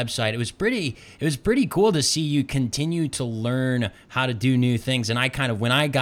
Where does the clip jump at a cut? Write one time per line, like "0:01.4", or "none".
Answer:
none

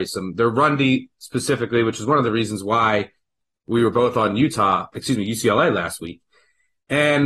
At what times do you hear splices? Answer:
none

